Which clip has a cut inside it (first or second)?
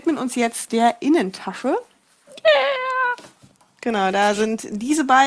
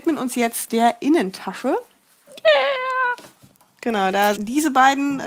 second